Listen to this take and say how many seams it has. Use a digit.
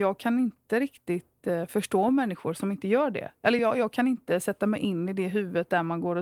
0